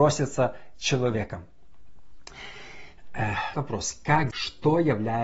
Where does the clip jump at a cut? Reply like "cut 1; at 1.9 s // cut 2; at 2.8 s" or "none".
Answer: cut 1; at 3.5 s // cut 2; at 4.3 s